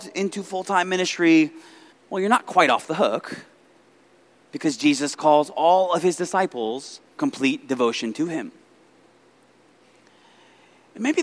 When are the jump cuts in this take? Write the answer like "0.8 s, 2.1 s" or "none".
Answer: 1.9 s, 7.2 s